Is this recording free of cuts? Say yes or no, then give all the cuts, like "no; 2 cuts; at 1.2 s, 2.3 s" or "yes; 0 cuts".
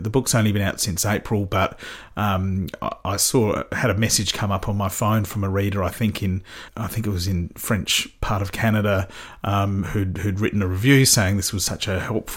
no; 1 cut; at 6.7 s